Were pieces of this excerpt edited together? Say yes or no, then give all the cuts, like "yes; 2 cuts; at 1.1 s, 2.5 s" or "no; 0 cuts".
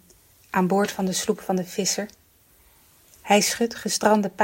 no; 0 cuts